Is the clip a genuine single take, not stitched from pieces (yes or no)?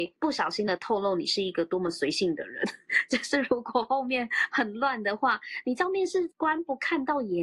no